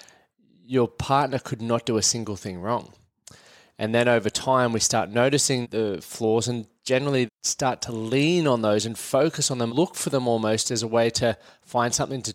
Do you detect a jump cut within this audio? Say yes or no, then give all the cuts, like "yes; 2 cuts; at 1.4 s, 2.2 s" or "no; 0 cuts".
yes; 3 cuts; at 5.6 s, 7.3 s, 9.7 s